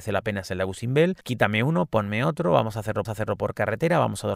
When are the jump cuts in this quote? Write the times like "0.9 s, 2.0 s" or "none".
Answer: 1.2 s, 3.1 s

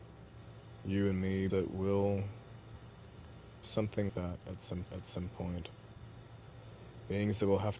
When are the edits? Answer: 1.5 s, 3.6 s, 4.1 s, 4.8 s

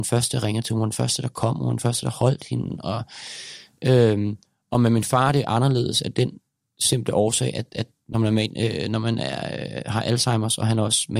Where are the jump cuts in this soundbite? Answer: none

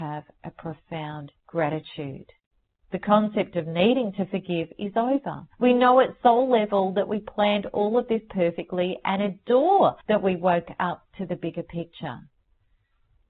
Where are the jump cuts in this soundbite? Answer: 1.4 s, 5.5 s, 10.0 s

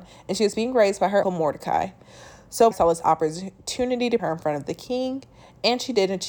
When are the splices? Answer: 1.2 s, 2.7 s, 4.2 s

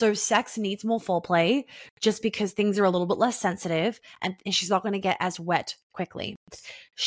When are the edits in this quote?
none

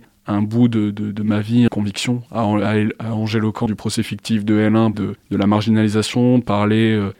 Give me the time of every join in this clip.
1.7 s, 3.7 s, 4.9 s

